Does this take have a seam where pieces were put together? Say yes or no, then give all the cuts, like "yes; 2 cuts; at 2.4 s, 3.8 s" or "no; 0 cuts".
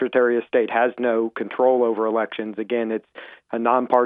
no; 0 cuts